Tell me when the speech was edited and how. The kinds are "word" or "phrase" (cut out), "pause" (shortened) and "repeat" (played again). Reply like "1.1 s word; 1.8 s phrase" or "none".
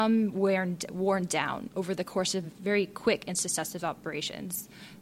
none